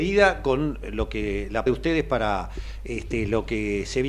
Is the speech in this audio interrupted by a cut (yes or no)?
yes